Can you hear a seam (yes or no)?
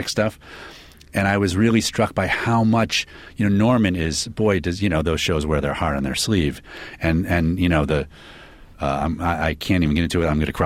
no